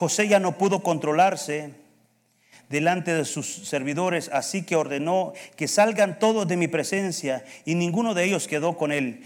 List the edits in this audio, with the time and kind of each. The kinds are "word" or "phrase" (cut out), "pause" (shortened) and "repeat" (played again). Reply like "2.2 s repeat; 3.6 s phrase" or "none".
none